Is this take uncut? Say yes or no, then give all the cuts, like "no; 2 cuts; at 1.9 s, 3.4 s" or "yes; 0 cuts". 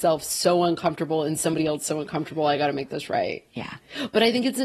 yes; 0 cuts